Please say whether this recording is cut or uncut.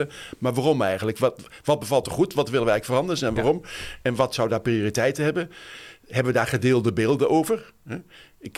uncut